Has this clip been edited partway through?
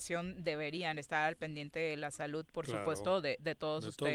no; 0 cuts

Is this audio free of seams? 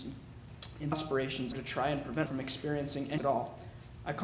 no; 4 cuts; at 0.9 s, 1.5 s, 2.3 s, 3.2 s

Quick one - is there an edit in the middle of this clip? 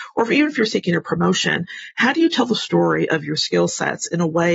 no; 0 cuts

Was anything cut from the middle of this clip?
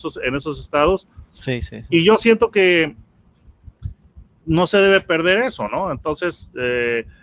no; 0 cuts

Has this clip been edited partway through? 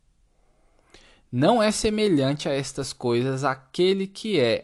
no; 0 cuts

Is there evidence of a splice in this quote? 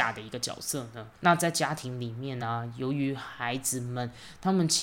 no; 0 cuts

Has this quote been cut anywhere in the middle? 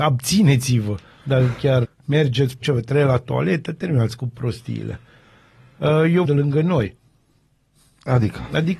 yes; 3 cuts; at 1.8 s, 2.6 s, 6.2 s

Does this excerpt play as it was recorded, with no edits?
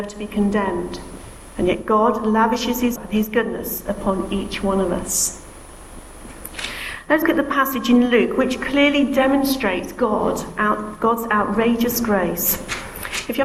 no; 2 cuts; at 3.0 s, 7.2 s

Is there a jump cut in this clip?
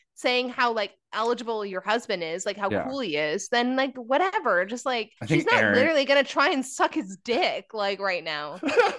yes; 1 cut; at 5.2 s

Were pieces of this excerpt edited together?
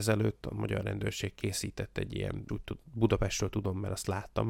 yes; 1 cut; at 2.5 s

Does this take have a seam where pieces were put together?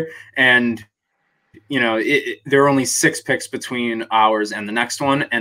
no; 0 cuts

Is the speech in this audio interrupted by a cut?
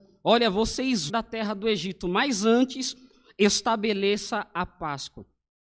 yes; 1 cut; at 1.1 s

